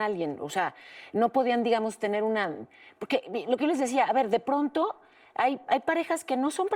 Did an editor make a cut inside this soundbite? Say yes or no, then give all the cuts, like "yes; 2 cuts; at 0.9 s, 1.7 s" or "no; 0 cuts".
no; 0 cuts